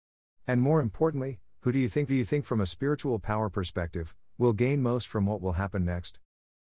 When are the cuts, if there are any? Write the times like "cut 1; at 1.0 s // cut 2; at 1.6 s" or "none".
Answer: cut 1; at 2.1 s